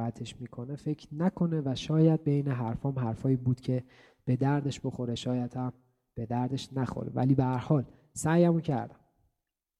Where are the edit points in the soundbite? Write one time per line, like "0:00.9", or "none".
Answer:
none